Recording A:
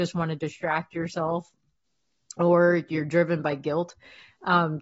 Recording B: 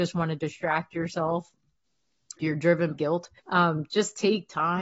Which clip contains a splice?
B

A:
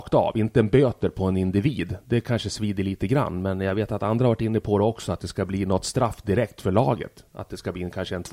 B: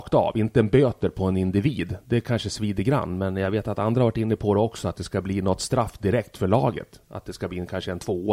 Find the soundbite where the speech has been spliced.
B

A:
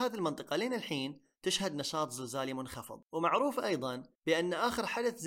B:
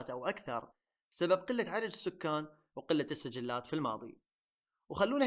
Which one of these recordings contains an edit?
A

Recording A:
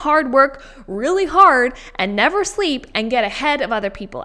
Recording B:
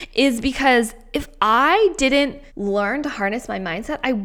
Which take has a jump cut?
B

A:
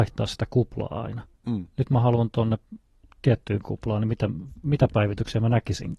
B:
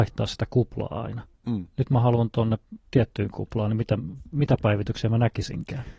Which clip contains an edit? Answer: B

